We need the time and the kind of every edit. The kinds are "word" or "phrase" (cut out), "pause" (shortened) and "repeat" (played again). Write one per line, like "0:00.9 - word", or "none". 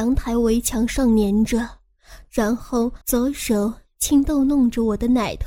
0:03.0 - pause